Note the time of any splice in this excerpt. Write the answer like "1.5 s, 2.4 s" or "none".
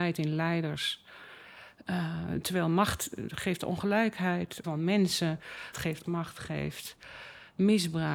4.6 s, 5.7 s, 6.0 s